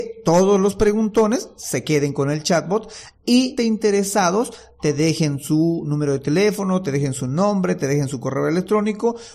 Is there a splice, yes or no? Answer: yes